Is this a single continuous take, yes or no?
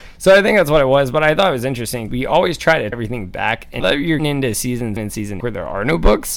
no